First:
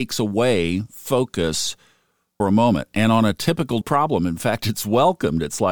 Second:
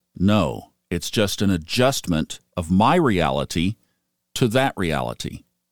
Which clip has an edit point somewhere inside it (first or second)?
first